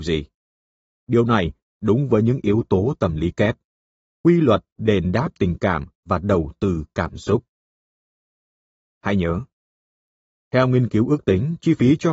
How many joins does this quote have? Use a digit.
0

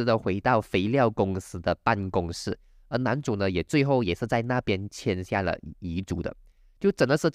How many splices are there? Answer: 0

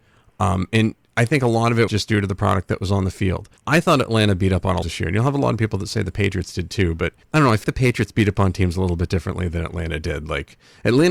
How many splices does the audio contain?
5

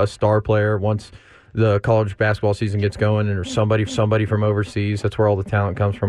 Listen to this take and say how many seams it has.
1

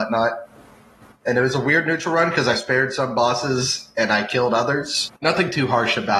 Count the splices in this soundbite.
1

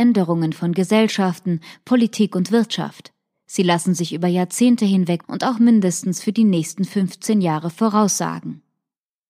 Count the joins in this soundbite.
1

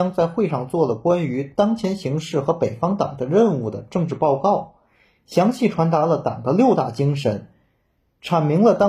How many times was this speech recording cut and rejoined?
0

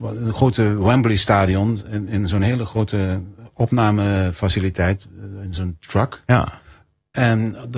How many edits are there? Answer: 0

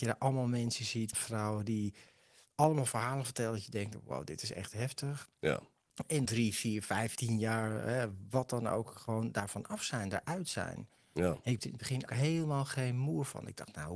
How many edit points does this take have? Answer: 5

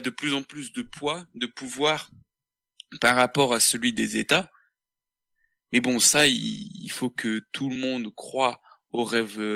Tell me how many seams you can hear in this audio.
0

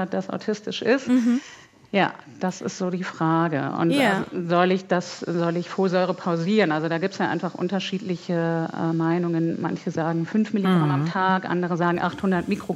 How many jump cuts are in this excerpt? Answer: 0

